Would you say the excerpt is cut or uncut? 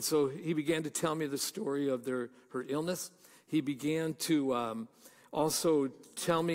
uncut